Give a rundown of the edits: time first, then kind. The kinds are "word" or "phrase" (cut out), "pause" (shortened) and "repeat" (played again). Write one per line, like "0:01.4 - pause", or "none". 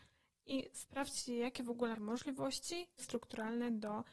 0:01.9 - word
0:03.0 - phrase